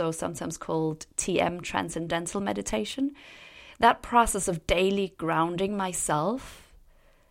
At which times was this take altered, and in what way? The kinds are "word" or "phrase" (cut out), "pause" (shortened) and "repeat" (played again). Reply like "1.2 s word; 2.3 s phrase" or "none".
none